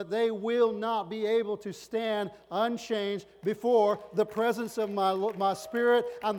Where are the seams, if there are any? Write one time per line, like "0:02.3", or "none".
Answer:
none